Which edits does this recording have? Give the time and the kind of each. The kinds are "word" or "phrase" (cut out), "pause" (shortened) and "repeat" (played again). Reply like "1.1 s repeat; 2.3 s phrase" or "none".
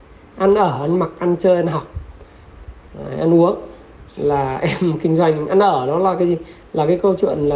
4.1 s pause